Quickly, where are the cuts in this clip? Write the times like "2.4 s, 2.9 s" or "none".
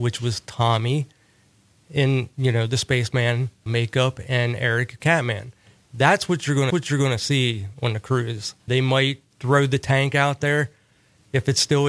2.3 s, 3.7 s, 5.0 s, 6.7 s, 8.7 s, 9.3 s